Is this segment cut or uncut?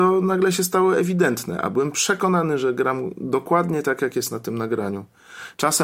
uncut